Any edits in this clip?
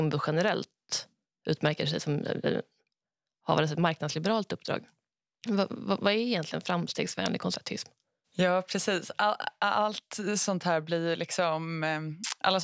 no; 0 cuts

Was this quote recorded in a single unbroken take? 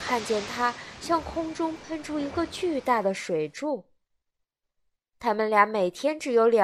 yes; 0 cuts

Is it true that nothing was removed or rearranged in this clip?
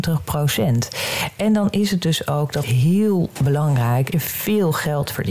no; 2 cuts; at 2.6 s, 4.1 s

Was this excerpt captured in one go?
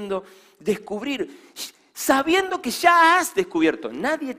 yes; 0 cuts

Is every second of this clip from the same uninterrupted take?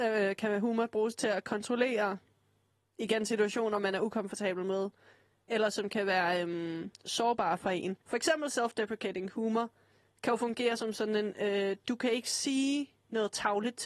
no; 1 cut; at 8.0 s

